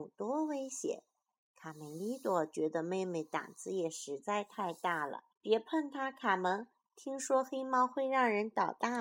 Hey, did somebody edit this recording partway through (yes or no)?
yes